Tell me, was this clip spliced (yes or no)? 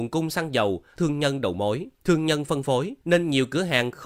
yes